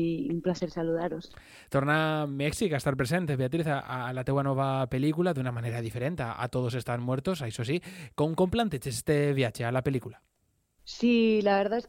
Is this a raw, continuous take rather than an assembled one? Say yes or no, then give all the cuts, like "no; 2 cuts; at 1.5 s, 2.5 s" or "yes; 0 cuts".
yes; 0 cuts